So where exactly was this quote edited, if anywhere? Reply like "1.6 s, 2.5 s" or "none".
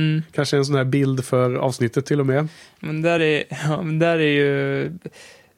none